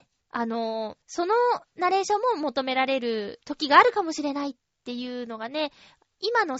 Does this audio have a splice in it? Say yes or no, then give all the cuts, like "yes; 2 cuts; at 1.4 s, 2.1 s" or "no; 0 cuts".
yes; 1 cut; at 1.0 s